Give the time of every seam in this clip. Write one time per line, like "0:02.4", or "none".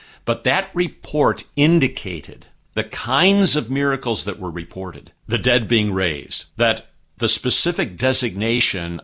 0:02.8
0:05.2
0:06.5